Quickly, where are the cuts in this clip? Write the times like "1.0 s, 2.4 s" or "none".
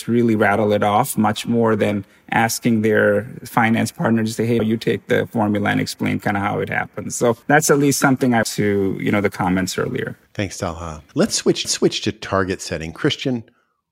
4.6 s, 7.4 s, 8.4 s, 10.2 s, 11.1 s, 11.6 s